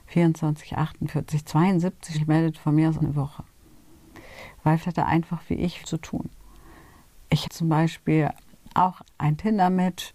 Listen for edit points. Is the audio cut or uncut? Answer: cut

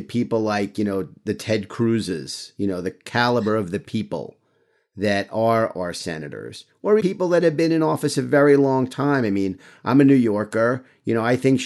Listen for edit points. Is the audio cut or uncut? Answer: cut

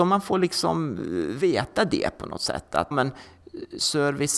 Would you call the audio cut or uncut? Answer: cut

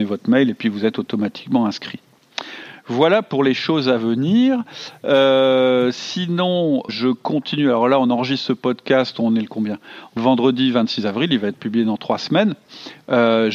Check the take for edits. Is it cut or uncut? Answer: cut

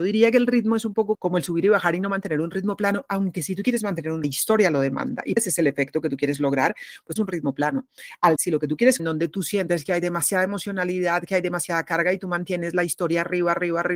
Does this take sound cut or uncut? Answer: cut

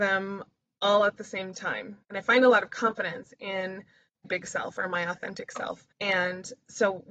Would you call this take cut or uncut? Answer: cut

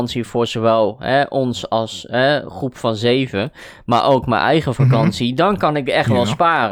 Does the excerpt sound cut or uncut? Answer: uncut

